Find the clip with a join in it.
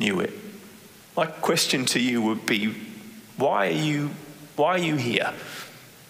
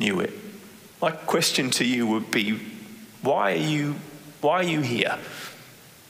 second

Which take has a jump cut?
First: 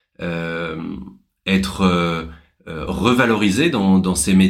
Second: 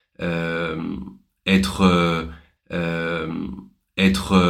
second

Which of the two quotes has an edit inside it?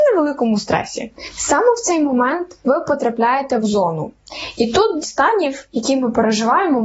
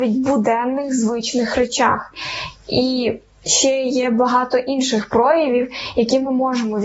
first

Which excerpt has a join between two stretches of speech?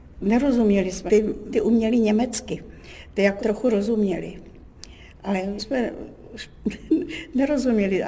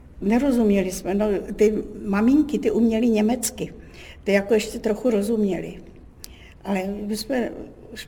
first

